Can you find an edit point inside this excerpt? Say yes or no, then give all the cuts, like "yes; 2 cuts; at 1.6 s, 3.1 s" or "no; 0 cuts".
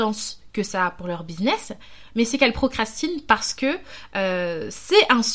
no; 0 cuts